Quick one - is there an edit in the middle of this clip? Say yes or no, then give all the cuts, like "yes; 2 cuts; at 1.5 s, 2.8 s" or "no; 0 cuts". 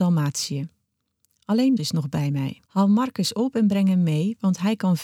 yes; 2 cuts; at 1.8 s, 2.7 s